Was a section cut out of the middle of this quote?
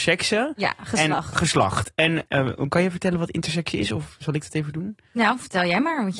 no; 0 cuts

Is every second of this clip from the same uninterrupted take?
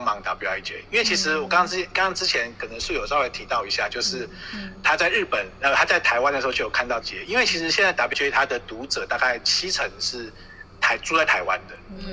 no; 2 cuts; at 7.0 s, 8.1 s

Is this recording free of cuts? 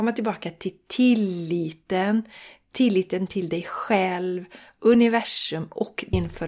yes; 0 cuts

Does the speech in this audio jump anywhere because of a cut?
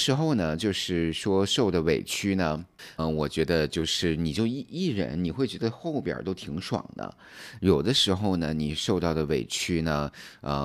yes; 1 cut; at 3.0 s

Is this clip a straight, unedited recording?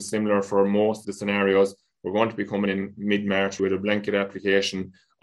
no; 3 cuts; at 1.0 s, 2.7 s, 3.6 s

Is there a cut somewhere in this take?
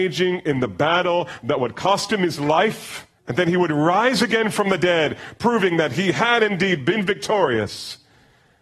yes; 1 cut; at 3.2 s

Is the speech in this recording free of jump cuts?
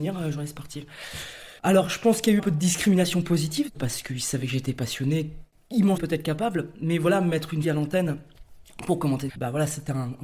no; 5 cuts; at 1.6 s, 2.4 s, 6.0 s, 7.6 s, 9.3 s

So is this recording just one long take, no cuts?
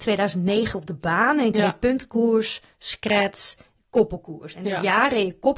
yes; 0 cuts

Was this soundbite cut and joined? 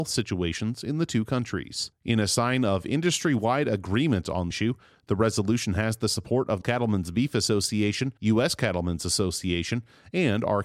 yes; 3 cuts; at 4.5 s, 6.6 s, 8.2 s

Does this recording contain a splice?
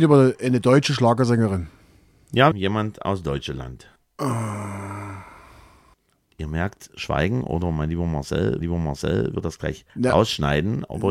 yes; 4 cuts; at 2.5 s, 4.0 s, 8.6 s, 9.9 s

